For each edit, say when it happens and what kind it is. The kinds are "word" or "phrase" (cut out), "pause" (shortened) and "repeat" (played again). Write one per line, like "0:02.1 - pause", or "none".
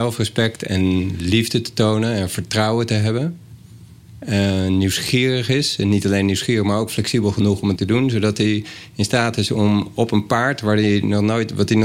0:07.8 - word